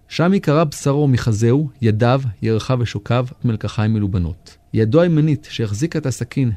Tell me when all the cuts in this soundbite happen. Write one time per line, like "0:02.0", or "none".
0:03.4
0:04.6